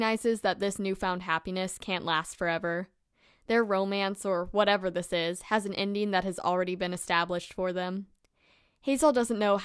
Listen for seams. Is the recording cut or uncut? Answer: uncut